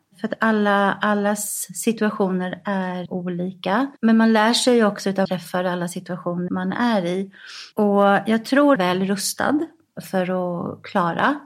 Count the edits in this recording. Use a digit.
6